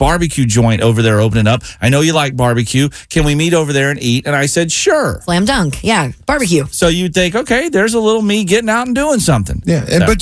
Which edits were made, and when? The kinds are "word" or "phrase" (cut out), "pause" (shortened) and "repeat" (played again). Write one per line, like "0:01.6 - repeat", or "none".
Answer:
none